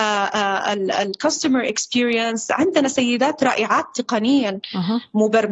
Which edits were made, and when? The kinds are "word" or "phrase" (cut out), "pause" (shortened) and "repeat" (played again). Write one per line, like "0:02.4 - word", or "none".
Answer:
none